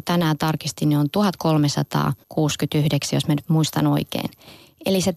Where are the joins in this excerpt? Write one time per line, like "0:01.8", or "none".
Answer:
0:02.2